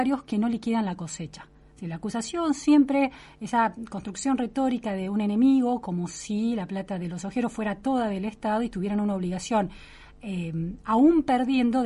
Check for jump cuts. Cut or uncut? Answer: uncut